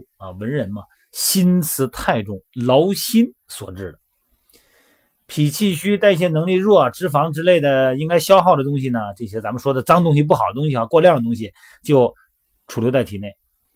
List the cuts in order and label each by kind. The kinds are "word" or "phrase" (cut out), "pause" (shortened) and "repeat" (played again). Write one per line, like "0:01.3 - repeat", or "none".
none